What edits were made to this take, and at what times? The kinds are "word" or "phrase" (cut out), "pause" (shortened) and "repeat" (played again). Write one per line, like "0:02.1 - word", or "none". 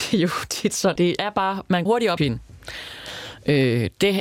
0:01.0 - word
0:01.9 - word
0:02.2 - word